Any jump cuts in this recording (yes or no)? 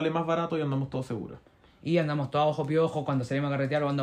no